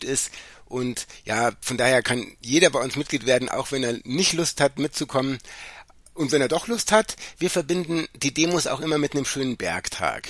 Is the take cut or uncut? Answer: uncut